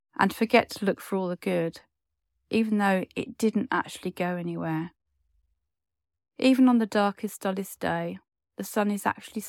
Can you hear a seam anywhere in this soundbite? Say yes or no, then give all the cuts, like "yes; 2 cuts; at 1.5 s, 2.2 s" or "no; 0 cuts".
no; 0 cuts